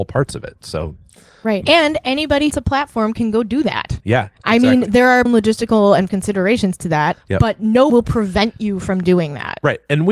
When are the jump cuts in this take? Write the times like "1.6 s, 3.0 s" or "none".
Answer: 1.6 s, 2.5 s, 4.0 s, 4.3 s, 5.3 s, 6.1 s, 7.2 s, 7.9 s